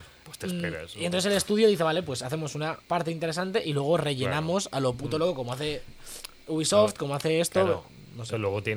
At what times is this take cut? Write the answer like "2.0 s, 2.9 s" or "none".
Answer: 2.8 s